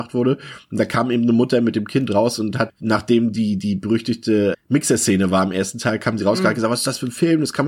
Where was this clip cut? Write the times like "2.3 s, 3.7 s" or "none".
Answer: 2.7 s, 4.5 s